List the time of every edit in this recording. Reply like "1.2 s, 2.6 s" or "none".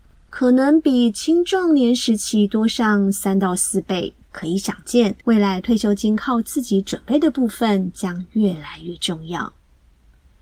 4.2 s, 5.2 s

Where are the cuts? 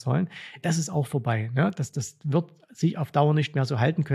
none

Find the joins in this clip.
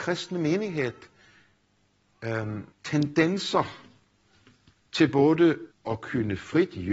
2.7 s, 5.7 s

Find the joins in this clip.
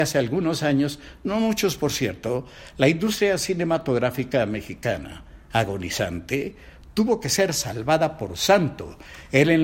none

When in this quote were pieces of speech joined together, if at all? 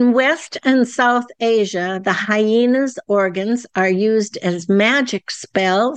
none

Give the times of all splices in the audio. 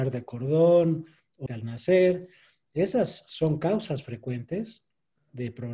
1.5 s

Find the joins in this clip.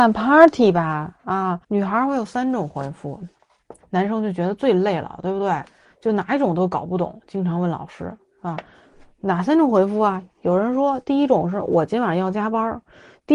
1.6 s, 3.8 s

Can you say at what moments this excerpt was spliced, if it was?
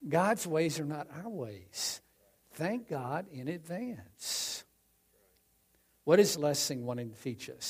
6.3 s

